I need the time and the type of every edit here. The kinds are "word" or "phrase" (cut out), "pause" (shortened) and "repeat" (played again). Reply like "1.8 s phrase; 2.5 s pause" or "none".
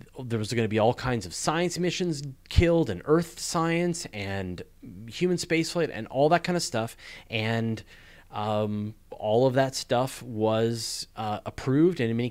9.0 s pause